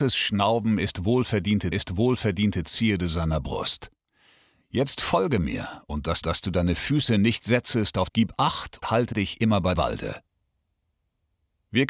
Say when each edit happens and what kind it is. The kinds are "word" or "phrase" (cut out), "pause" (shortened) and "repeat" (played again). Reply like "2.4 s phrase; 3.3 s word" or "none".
1.7 s repeat; 6.2 s repeat; 8.1 s phrase; 8.8 s word; 9.1 s word; 9.8 s word